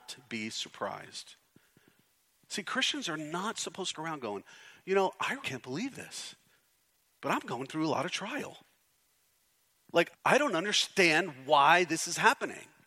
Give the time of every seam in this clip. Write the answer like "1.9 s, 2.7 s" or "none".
3.9 s, 5.4 s, 10.1 s